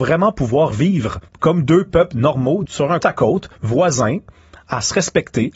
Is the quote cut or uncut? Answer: cut